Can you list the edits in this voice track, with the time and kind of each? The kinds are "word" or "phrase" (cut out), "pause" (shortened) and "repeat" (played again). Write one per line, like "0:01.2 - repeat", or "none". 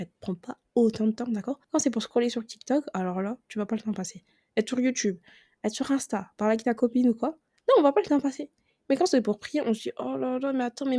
0:01.6 - pause

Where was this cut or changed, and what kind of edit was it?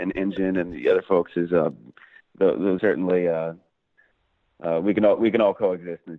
0:02.8 - word

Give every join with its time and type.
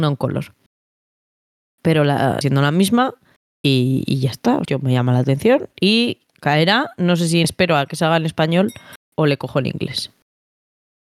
0:02.4 - phrase
0:04.6 - word
0:07.4 - word
0:09.0 - pause

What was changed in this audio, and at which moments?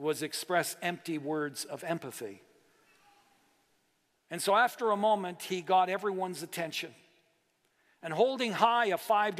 none

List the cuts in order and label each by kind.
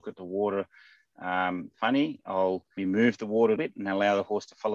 0:02.8 - word
0:03.6 - word

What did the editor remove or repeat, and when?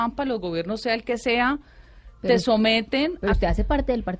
none

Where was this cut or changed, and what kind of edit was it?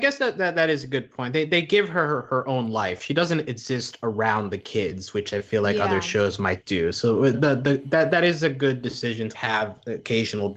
0:07.3 - word
0:09.3 - word

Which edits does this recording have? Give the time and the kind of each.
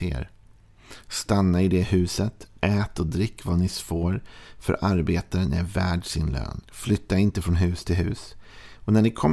0:06.6 - pause

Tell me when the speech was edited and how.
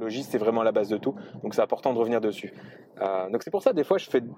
none

